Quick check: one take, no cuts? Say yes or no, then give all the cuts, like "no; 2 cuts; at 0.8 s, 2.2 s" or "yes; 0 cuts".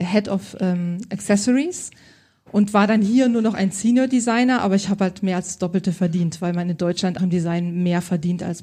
no; 1 cut; at 7.2 s